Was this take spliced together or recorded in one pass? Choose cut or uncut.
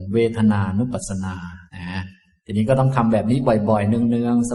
cut